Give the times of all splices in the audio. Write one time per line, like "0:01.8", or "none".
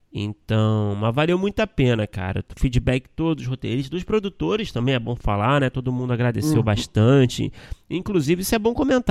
none